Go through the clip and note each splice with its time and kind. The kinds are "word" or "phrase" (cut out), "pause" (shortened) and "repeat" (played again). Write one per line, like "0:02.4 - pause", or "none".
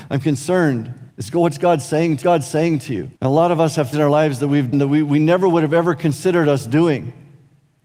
0:01.1 - pause
0:02.2 - repeat
0:03.2 - pause
0:03.9 - word
0:04.7 - word

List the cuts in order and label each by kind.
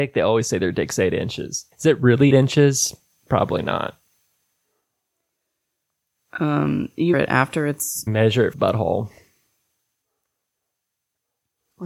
0:01.7 - pause
0:02.3 - word
0:07.1 - word
0:08.1 - phrase
0:08.5 - phrase

